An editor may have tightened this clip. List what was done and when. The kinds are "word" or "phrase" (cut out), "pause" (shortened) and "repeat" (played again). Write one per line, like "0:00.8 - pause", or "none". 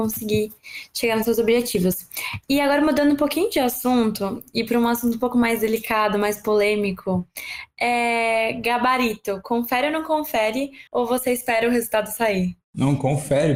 0:10.9 - pause